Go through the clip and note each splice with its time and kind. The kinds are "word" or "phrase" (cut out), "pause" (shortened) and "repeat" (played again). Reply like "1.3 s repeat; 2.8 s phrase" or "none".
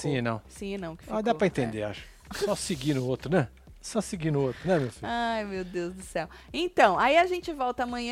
2.2 s pause